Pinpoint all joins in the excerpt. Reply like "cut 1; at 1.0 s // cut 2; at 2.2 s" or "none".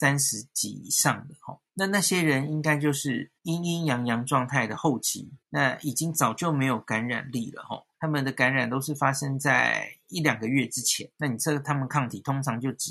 cut 1; at 1.7 s // cut 2; at 3.4 s // cut 3; at 5.4 s // cut 4; at 7.9 s // cut 5; at 11.1 s